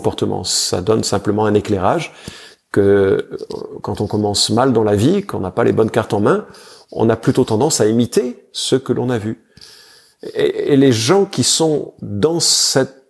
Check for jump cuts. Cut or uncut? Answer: uncut